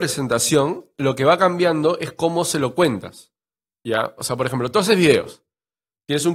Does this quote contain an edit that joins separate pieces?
no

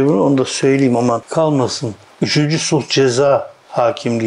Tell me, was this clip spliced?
yes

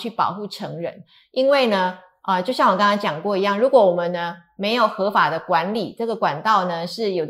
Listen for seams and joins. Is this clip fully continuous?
yes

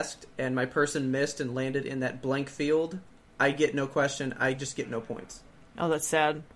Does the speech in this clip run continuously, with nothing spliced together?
yes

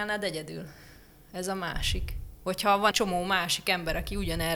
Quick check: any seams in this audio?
yes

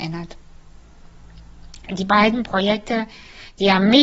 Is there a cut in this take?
no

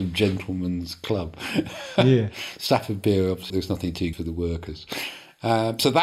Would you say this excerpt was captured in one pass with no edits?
no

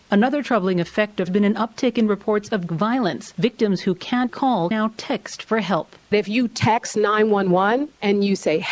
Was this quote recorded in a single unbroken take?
no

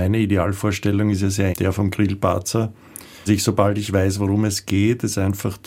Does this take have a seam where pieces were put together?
yes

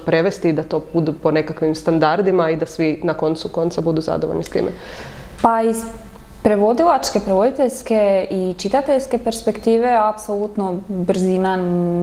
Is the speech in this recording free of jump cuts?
yes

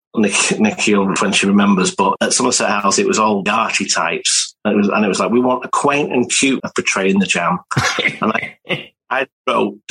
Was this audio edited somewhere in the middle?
yes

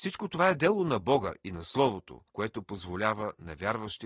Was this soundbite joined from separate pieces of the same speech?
yes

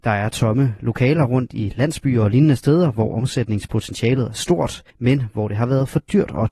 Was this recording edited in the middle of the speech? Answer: yes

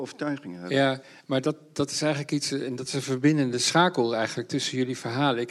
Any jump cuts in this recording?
no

